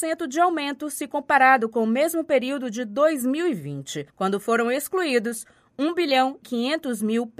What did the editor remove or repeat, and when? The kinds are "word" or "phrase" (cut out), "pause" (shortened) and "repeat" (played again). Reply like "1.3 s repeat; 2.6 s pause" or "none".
4.1 s pause; 6.4 s word